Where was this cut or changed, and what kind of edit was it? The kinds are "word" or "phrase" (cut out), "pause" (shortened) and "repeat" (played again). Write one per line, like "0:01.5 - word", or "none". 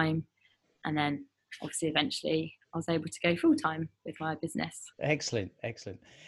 0:04.9 - pause